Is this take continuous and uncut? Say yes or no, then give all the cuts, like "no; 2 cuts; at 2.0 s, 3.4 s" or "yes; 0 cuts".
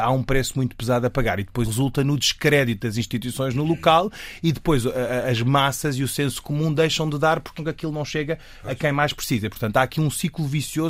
no; 2 cuts; at 1.6 s, 7.6 s